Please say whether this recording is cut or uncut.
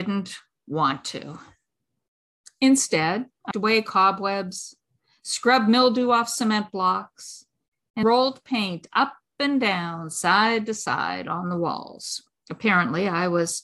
cut